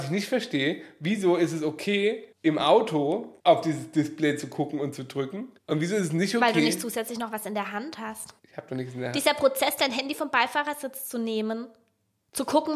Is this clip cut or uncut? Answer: cut